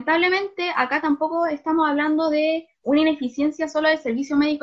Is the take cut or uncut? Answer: uncut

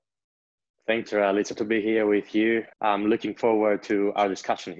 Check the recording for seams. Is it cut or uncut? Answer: cut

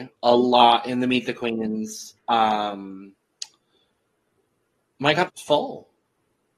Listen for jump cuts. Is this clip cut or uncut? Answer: cut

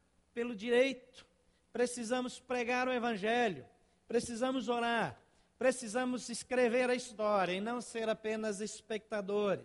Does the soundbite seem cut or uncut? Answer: uncut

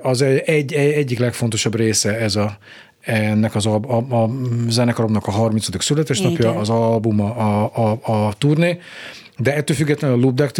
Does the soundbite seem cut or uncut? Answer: uncut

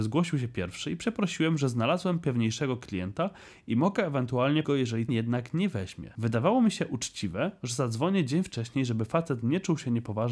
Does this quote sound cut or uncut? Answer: cut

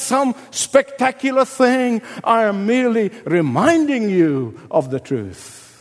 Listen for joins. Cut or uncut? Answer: uncut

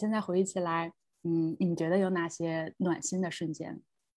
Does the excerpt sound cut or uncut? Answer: uncut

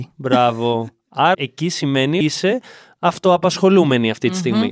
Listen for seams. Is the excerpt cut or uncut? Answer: cut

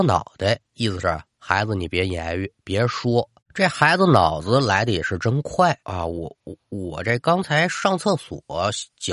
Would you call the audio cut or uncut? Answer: cut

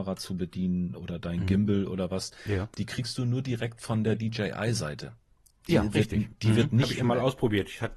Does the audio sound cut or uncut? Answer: uncut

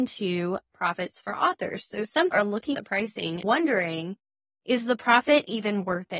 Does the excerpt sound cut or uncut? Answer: cut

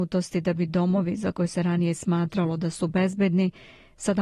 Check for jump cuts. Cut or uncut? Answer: uncut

